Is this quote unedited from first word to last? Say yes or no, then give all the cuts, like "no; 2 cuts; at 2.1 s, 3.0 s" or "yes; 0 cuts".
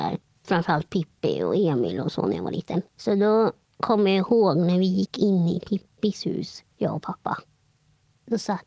no; 2 cuts; at 2.9 s, 6.7 s